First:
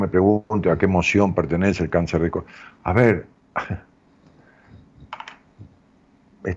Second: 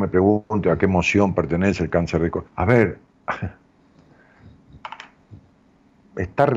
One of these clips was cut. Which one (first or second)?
second